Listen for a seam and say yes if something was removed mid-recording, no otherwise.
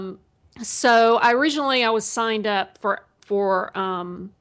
no